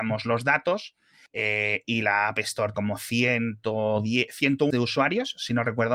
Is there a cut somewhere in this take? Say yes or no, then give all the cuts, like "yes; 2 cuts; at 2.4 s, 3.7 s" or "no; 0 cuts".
yes; 3 cuts; at 1.3 s, 2.7 s, 4.7 s